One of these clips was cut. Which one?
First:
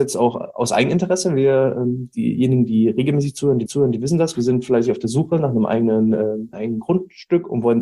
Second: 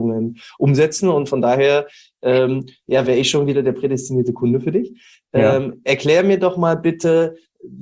first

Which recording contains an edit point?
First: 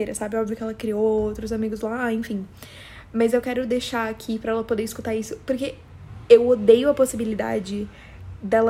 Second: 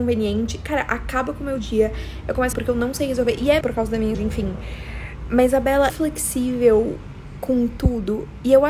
second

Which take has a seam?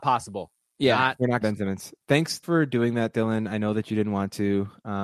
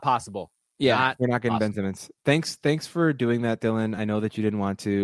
first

